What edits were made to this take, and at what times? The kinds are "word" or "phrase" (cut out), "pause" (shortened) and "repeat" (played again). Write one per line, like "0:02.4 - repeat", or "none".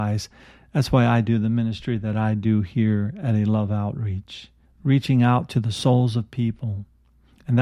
0:04.6 - pause